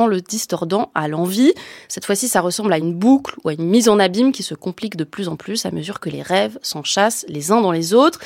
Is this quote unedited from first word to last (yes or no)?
yes